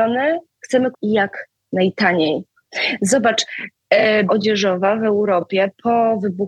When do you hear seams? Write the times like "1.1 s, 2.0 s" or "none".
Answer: 0.9 s, 4.3 s